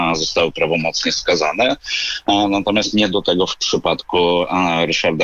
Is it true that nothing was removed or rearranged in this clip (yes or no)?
no